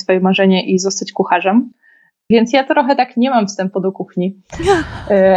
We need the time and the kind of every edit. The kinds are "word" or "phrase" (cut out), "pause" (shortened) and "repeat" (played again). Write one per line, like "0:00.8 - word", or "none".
none